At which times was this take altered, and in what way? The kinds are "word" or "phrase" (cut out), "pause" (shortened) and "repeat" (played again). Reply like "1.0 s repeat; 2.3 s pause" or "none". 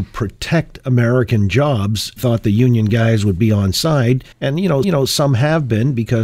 2.2 s phrase; 4.3 s pause; 4.8 s repeat